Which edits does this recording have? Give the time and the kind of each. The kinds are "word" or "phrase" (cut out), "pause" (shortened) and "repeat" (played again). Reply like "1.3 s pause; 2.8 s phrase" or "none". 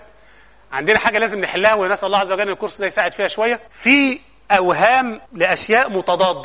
3.7 s pause; 5.3 s pause

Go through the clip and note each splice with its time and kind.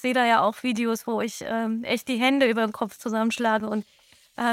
none

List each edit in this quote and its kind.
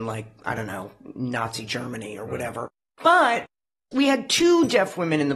none

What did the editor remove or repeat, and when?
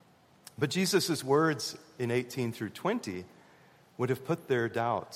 none

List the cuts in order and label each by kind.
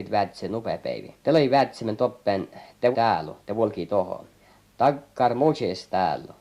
1.2 s pause; 2.9 s word; 3.4 s pause; 4.4 s pause

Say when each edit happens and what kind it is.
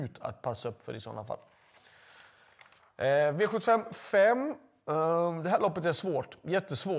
none

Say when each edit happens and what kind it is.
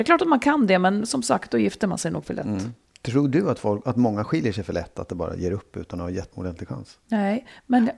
6.3 s word

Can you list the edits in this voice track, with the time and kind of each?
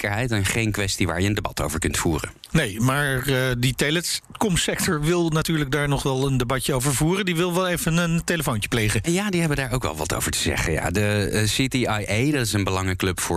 none

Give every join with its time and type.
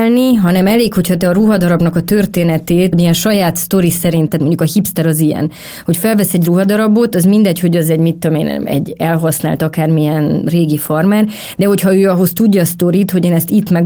2.9 s word; 4.3 s word

